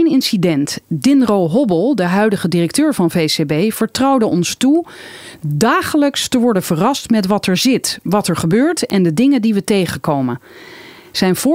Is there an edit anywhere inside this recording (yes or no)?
no